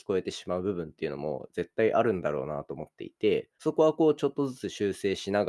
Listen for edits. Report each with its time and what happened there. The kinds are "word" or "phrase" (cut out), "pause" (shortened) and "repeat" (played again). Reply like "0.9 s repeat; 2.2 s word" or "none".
3.5 s pause